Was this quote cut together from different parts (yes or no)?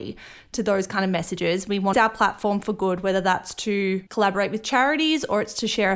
yes